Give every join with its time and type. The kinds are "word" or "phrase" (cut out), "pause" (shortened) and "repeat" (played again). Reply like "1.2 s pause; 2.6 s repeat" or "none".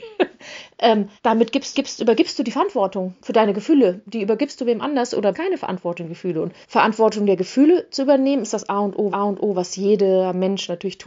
1.2 s pause; 1.7 s repeat; 5.3 s phrase; 6.6 s pause; 9.1 s repeat